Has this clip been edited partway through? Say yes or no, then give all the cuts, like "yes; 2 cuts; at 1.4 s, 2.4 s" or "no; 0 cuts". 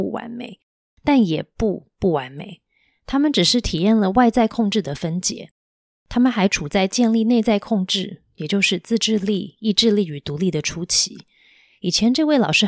no; 0 cuts